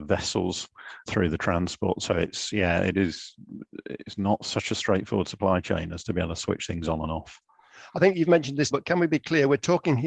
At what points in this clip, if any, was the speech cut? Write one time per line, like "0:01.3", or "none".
0:01.1
0:08.7